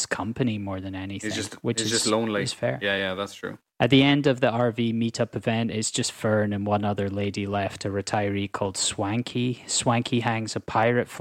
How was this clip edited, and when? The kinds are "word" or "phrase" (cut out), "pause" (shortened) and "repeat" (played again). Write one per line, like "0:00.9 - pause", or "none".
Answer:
none